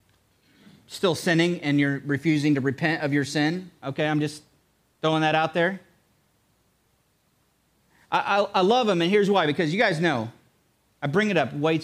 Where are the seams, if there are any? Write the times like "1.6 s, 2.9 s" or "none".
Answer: none

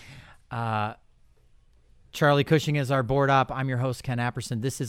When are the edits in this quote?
none

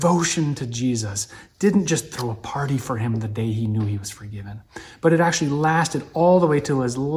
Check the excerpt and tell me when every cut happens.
none

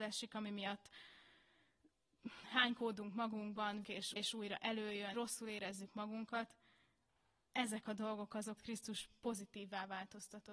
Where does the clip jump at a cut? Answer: 2.4 s, 3.8 s, 4.2 s, 5.1 s, 8.6 s

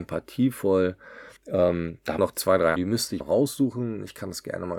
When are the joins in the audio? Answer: 1.4 s, 2.2 s, 2.8 s, 3.2 s

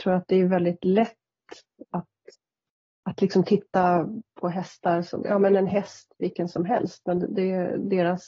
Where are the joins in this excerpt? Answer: 1.9 s

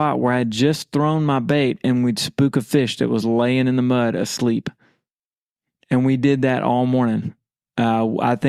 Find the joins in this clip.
none

